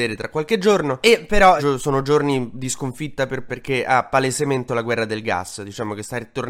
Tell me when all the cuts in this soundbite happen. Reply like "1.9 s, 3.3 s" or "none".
1.6 s, 3.5 s, 4.7 s